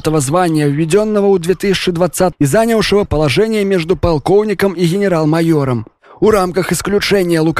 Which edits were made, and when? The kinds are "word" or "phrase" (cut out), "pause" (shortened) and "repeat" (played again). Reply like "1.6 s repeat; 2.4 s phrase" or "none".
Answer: 2.3 s word; 3.1 s word